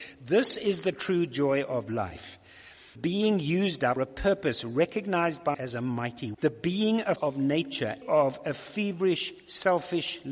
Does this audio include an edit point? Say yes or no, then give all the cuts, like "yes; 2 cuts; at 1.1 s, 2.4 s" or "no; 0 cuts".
yes; 6 cuts; at 2.9 s, 4.0 s, 5.5 s, 6.3 s, 7.2 s, 8.0 s